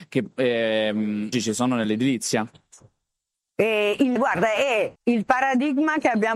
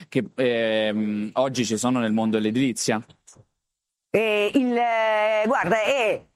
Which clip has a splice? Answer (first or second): first